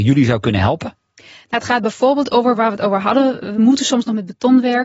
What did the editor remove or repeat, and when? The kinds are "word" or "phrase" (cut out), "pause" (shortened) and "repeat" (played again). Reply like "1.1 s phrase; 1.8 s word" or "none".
none